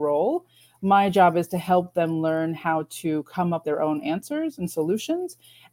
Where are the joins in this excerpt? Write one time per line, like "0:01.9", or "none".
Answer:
0:03.6